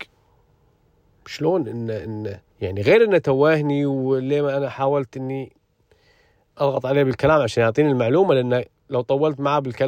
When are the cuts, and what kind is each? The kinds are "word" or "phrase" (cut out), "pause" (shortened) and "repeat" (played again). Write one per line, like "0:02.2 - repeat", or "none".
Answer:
0:02.5 - pause